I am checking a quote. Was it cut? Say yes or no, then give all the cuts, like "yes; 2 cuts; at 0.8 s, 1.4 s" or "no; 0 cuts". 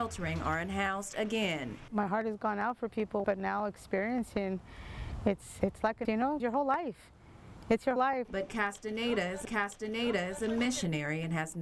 yes; 6 cuts; at 3.2 s, 5.6 s, 6.0 s, 6.4 s, 8.0 s, 9.4 s